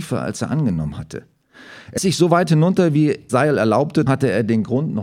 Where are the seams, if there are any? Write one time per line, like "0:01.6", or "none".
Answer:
0:02.0
0:03.3
0:04.1